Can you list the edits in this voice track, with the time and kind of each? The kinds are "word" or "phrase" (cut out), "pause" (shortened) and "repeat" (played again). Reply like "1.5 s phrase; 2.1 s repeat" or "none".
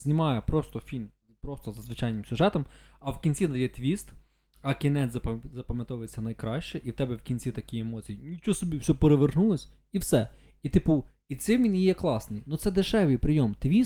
none

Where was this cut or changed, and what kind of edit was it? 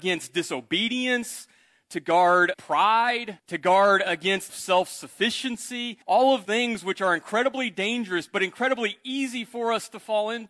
2.5 s word; 3.4 s pause; 4.5 s phrase; 6.0 s pause; 6.4 s word

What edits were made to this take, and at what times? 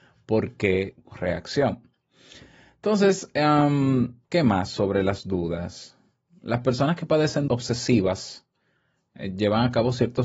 1.1 s word; 4.2 s pause; 7.5 s word

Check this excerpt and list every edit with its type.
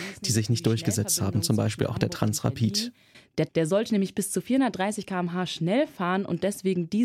3.5 s word

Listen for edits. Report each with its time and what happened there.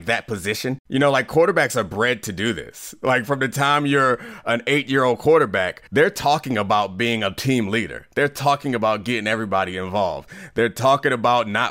5.9 s pause

